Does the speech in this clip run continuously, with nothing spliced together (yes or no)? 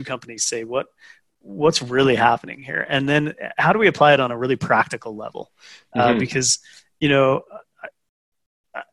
yes